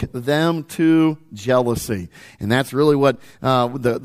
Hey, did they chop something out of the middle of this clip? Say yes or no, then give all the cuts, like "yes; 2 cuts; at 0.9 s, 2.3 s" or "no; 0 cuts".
no; 0 cuts